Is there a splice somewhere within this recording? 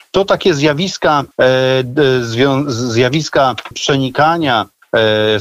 yes; 2 cuts; at 1.3 s, 3.7 s

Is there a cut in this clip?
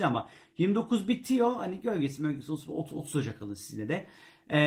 no; 0 cuts

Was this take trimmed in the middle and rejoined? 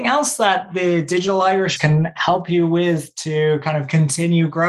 yes; 1 cut; at 1.8 s

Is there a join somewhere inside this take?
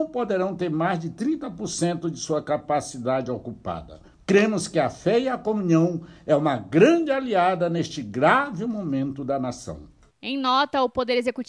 no; 0 cuts

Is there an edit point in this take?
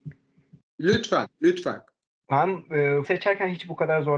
yes; 1 cut; at 3.0 s

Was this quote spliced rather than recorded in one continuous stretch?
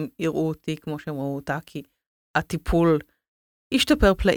no; 0 cuts

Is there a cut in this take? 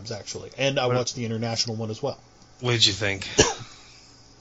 no; 0 cuts

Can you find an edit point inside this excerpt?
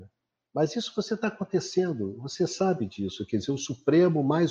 no; 0 cuts

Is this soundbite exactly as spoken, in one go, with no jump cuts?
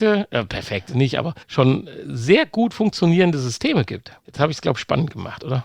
no; 2 cuts; at 1.4 s, 4.2 s

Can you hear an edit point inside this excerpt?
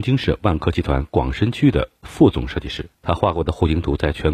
yes; 1 cut; at 2.9 s

